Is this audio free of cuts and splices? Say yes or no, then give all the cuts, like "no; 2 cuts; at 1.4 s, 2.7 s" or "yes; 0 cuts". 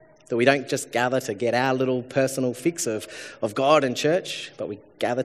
yes; 0 cuts